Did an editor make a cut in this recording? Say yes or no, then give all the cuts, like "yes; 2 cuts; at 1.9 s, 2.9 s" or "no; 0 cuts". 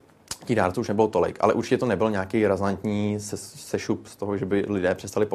no; 0 cuts